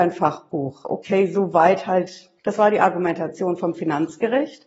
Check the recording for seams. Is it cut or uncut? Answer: cut